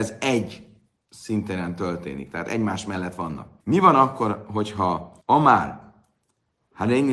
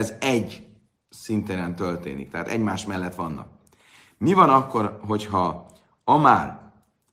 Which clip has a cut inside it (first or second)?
first